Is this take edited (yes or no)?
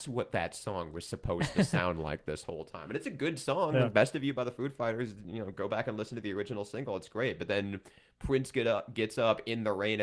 no